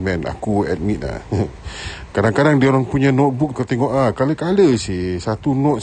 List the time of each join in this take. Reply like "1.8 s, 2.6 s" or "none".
2.1 s, 3.6 s